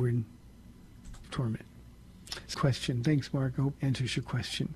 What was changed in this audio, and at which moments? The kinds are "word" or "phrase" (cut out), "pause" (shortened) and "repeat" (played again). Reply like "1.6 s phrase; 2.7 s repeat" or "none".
1.2 s phrase; 2.5 s word; 3.7 s word